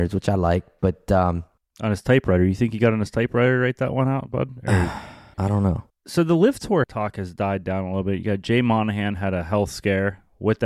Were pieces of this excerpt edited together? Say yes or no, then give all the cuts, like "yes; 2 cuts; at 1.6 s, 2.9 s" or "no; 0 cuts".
no; 0 cuts